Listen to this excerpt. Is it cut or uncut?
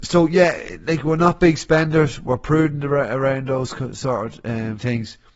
uncut